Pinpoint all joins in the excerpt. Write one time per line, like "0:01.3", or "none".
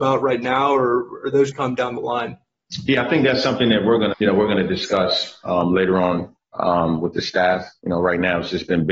0:01.5
0:04.1